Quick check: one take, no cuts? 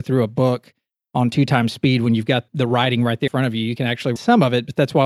no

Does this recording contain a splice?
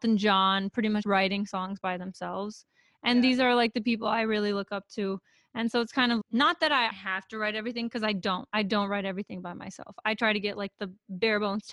yes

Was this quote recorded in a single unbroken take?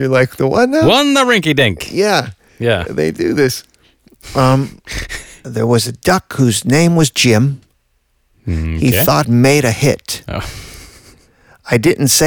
no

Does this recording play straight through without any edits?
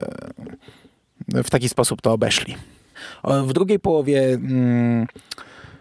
yes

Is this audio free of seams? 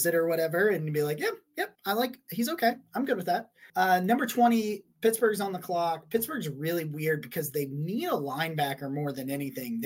no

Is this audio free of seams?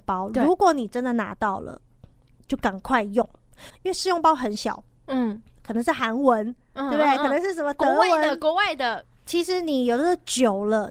yes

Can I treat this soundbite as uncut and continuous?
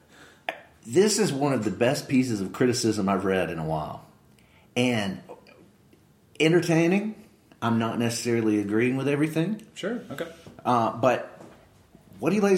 yes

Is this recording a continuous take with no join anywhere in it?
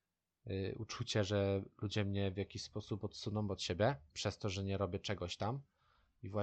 no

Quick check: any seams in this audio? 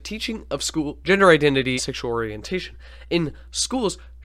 yes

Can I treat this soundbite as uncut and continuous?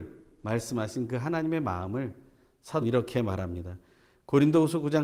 no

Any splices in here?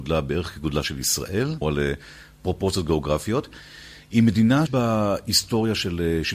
yes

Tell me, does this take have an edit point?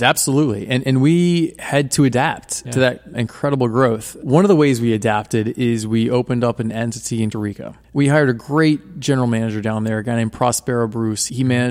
yes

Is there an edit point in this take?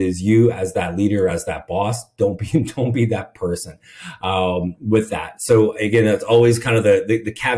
no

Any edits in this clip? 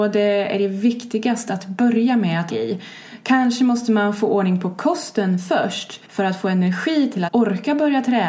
yes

